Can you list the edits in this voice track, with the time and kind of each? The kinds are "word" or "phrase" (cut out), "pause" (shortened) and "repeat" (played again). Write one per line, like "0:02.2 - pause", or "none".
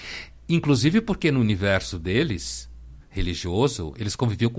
0:03.0 - pause